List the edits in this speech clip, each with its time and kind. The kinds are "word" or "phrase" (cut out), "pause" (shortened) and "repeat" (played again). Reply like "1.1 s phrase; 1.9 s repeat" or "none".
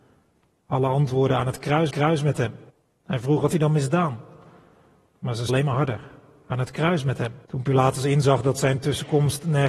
1.9 s repeat; 2.7 s pause; 3.5 s word; 5.5 s word; 7.4 s pause